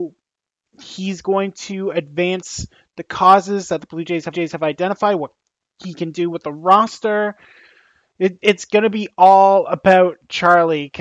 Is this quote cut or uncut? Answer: cut